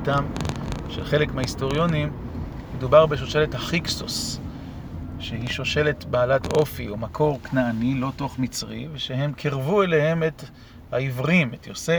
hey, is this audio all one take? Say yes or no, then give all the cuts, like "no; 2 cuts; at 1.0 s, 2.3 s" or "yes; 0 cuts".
yes; 0 cuts